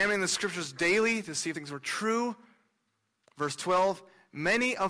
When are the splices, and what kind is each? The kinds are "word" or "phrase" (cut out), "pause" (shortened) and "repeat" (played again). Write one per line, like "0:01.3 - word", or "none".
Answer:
0:01.5 - word